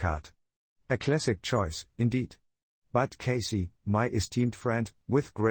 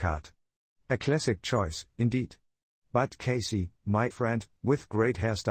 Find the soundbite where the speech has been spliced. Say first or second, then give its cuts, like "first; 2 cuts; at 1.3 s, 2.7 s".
second; 1 cut; at 4.1 s